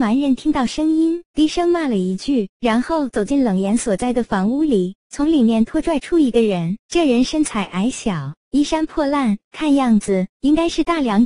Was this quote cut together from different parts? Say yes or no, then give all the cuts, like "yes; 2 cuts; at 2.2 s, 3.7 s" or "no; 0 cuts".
no; 0 cuts